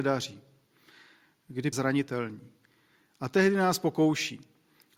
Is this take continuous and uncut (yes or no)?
no